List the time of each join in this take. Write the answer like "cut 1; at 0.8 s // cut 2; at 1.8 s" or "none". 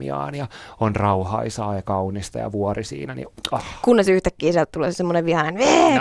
none